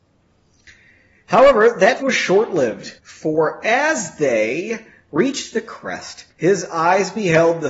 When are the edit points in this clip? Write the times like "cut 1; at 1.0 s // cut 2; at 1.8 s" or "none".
cut 1; at 2.0 s // cut 2; at 3.0 s // cut 3; at 6.3 s